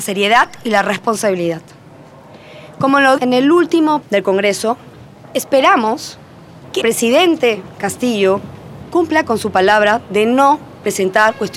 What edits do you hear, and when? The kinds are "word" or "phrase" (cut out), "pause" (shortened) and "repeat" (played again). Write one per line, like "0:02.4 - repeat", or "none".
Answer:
0:03.2 - word
0:04.0 - word
0:06.8 - word